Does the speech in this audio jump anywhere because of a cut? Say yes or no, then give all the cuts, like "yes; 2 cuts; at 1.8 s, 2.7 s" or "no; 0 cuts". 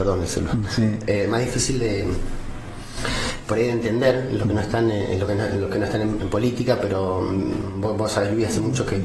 yes; 1 cut; at 6.2 s